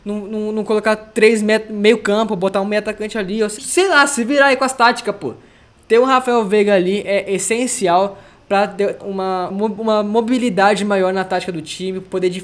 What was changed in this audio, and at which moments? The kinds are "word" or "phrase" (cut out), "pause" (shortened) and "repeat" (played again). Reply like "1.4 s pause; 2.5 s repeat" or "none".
3.6 s word; 9.0 s word; 9.5 s word